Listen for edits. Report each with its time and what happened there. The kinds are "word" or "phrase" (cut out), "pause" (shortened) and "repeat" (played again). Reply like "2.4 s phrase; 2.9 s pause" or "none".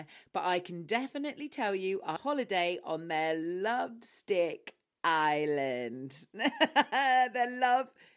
2.2 s phrase